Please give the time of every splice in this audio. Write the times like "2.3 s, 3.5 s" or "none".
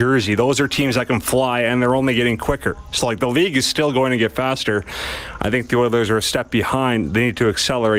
none